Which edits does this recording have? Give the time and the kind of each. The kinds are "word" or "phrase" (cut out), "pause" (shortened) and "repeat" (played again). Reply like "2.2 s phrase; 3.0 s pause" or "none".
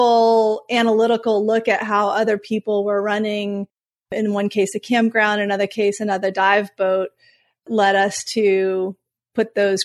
none